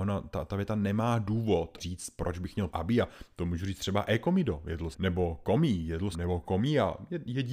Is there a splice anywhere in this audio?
yes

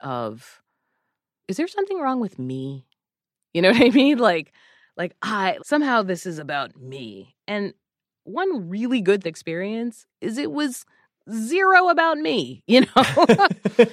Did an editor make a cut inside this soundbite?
yes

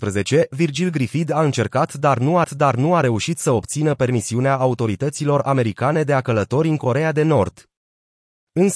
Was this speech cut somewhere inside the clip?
yes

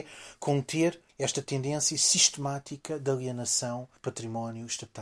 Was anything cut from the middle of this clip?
yes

